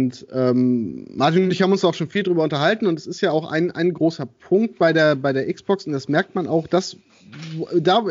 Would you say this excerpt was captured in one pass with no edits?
yes; 0 cuts

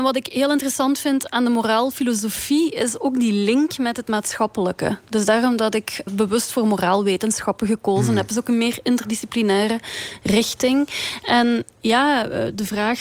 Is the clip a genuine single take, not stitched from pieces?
no; 1 cut; at 6.1 s

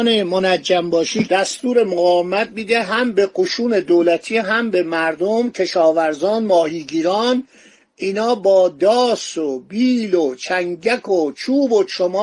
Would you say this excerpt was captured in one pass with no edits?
yes; 0 cuts

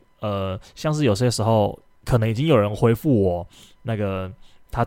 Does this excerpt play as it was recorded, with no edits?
yes; 0 cuts

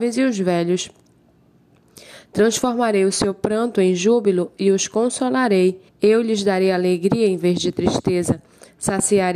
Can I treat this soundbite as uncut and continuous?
no; 1 cut; at 5.9 s

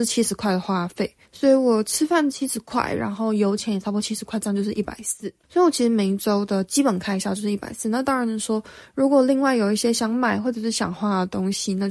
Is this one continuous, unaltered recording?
no; 2 cuts; at 1.3 s, 5.4 s

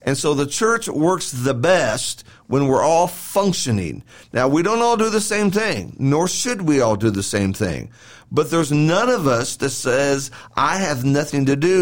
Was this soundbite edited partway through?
no; 0 cuts

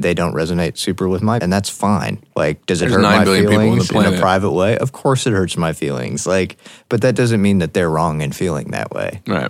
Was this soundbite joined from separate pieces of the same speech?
yes; 2 cuts; at 1.4 s, 2.3 s

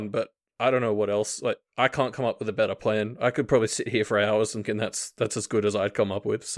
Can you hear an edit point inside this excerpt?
yes; 1 cut; at 4.6 s

